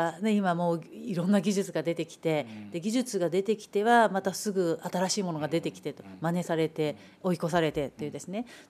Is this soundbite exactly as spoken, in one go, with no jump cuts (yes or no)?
yes